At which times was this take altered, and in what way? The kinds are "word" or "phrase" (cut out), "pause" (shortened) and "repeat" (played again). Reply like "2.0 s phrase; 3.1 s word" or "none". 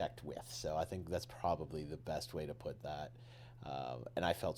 none